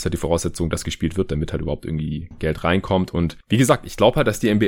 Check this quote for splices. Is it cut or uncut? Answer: uncut